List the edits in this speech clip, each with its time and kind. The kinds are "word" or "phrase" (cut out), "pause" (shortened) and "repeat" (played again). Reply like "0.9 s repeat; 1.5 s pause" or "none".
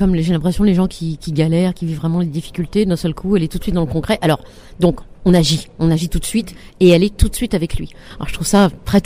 none

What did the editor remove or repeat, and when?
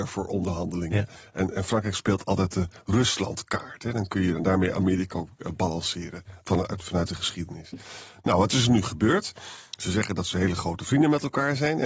none

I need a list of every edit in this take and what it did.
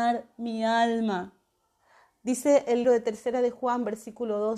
2.8 s word

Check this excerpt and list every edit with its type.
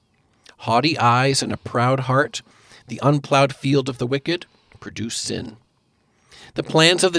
none

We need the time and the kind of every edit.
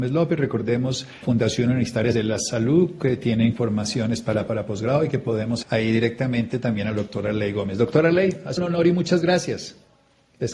1.2 s word; 2.1 s word; 4.5 s word; 5.6 s word; 8.6 s word

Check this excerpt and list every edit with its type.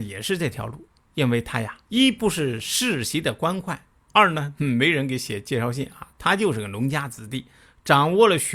1.8 s pause

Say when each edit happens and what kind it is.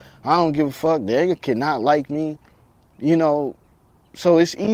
none

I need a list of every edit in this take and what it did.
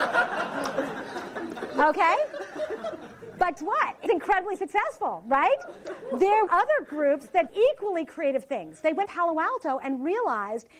3.6 s word; 4.1 s word; 6.5 s word; 7.5 s word; 9.1 s word

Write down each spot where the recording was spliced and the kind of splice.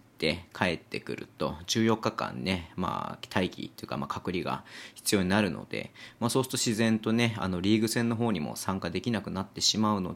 none

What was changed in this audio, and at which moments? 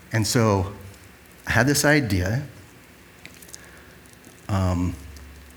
none

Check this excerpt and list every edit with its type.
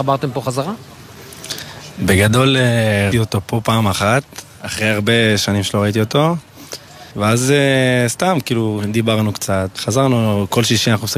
3.1 s word; 7.1 s pause; 9.8 s word

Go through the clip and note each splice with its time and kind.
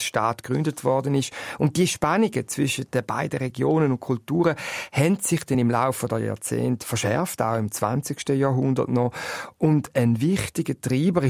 none

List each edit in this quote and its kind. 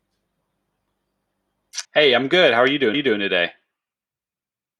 1.8 s pause; 2.9 s repeat

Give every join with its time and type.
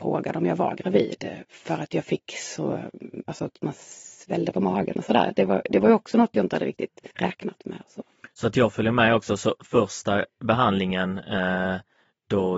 7.1 s pause

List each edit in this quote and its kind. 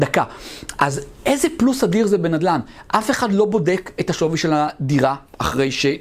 none

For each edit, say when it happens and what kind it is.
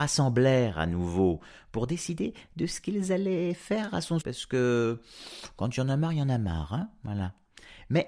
4.2 s word

